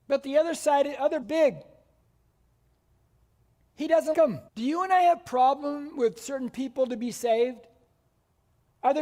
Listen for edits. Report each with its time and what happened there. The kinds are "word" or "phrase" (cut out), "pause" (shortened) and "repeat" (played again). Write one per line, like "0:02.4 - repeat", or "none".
0:01.2 - phrase
0:04.1 - word
0:04.5 - pause